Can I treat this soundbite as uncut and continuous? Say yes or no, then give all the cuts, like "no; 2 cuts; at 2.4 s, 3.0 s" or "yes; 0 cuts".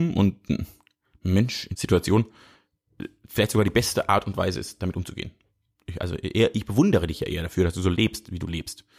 no; 1 cut; at 1.7 s